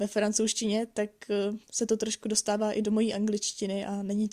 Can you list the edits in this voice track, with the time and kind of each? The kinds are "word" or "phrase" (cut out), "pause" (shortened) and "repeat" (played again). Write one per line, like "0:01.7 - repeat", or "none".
0:01.6 - pause